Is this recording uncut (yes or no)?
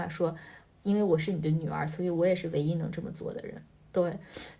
yes